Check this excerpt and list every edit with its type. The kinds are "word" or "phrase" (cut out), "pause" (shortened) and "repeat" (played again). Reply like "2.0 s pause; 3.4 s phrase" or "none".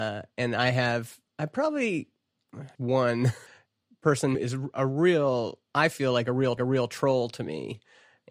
1.3 s pause; 2.8 s word; 3.5 s pause; 4.3 s word; 5.7 s pause; 6.6 s repeat

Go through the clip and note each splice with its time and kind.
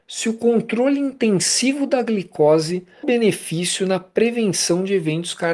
3.0 s word

